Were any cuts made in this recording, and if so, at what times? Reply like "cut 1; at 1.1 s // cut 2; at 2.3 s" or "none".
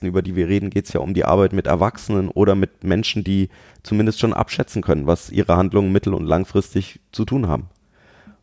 none